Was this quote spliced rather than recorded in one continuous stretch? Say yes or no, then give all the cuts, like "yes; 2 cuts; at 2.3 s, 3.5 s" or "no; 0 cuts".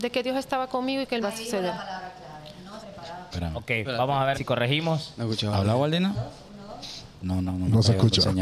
yes; 4 cuts; at 1.2 s, 2.8 s, 3.3 s, 4.3 s